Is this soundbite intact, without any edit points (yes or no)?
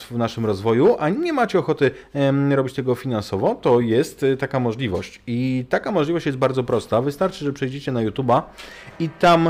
yes